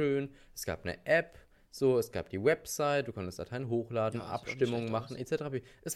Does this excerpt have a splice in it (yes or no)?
no